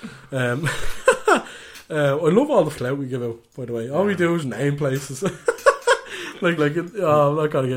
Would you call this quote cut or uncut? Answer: cut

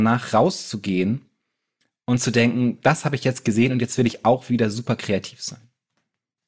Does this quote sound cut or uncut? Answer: uncut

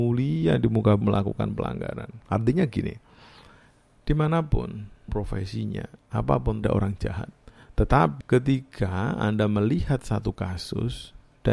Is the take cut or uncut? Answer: cut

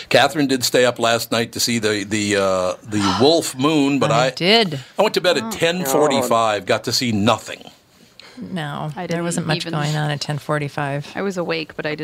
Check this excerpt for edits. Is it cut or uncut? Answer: uncut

